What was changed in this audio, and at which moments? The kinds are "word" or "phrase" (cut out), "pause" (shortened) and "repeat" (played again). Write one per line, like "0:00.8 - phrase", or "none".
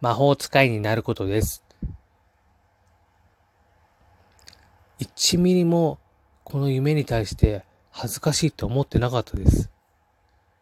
none